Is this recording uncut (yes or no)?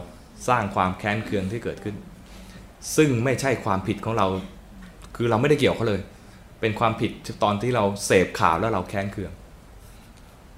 yes